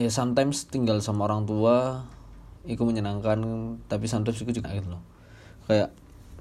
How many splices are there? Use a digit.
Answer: 1